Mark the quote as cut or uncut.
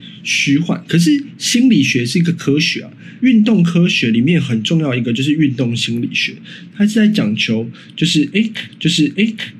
cut